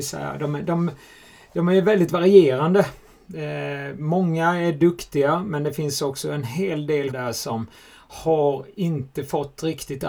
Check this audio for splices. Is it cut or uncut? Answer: cut